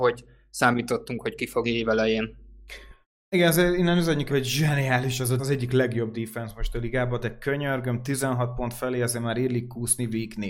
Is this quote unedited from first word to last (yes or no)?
no